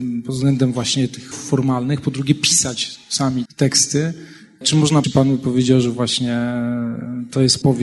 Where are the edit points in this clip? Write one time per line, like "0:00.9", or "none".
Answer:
0:01.3
0:03.5
0:05.0